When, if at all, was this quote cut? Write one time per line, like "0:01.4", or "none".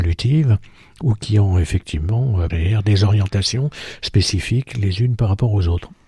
0:02.5